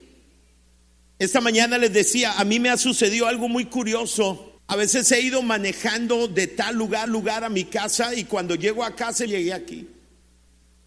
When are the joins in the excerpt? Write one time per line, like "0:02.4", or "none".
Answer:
0:04.6
0:07.1
0:09.3